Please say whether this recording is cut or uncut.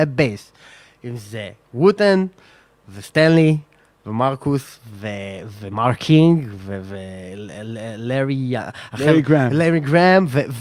uncut